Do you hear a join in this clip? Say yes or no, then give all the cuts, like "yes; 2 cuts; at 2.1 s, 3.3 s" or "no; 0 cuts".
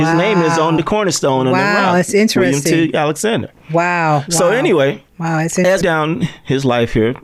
yes; 2 cuts; at 5.1 s, 5.8 s